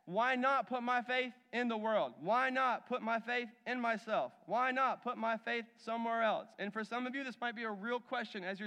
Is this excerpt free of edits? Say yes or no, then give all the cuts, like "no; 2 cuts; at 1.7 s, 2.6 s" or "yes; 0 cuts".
yes; 0 cuts